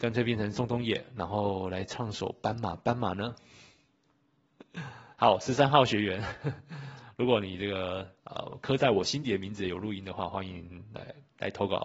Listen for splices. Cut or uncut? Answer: cut